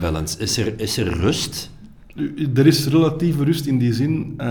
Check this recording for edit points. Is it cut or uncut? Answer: uncut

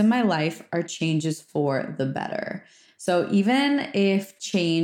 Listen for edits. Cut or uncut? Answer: uncut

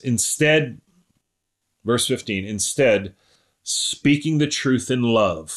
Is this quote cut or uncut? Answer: uncut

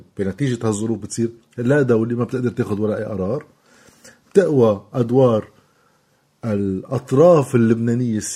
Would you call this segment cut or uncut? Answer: uncut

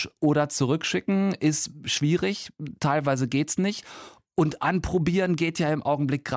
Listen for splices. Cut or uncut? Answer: uncut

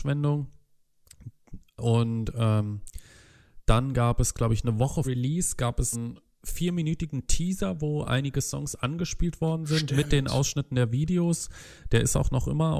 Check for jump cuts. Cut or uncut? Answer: cut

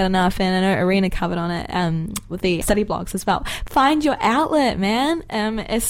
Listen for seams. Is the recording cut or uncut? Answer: cut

